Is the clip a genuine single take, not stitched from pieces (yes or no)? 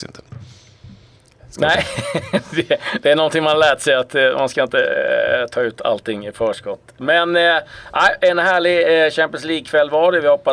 yes